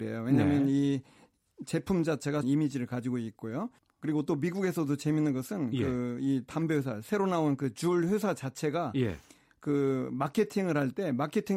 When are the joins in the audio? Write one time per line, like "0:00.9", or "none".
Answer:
0:02.4
0:03.8

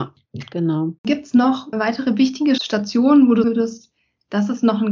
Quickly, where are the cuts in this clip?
0:01.0
0:01.7
0:02.6
0:03.4

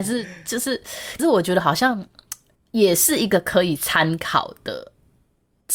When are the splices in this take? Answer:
0:01.2
0:02.6

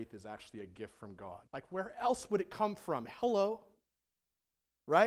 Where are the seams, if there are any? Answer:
0:01.5

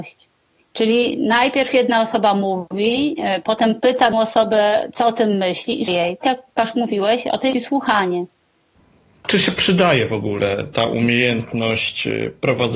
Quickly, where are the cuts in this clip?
0:04.1
0:05.9
0:06.2
0:07.5

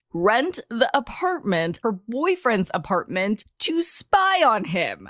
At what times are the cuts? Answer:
0:01.8

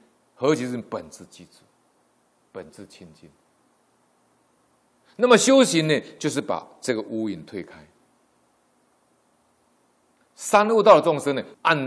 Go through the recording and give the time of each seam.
none

